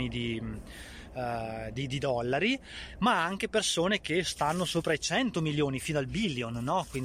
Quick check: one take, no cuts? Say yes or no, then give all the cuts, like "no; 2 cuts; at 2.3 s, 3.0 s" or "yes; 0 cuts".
yes; 0 cuts